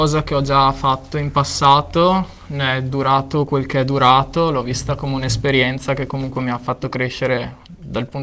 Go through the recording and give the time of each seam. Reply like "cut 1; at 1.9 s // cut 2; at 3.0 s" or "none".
none